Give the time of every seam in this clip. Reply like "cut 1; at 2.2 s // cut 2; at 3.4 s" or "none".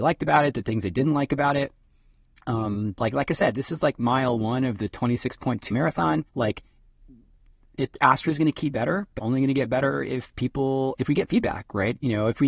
cut 1; at 5.7 s // cut 2; at 6.3 s // cut 3; at 8.7 s // cut 4; at 9.2 s // cut 5; at 11.0 s